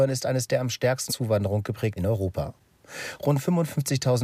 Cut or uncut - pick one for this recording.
cut